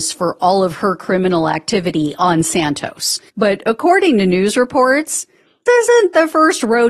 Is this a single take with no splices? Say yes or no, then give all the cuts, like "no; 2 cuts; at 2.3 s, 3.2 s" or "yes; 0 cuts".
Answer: no; 2 cuts; at 3.3 s, 5.7 s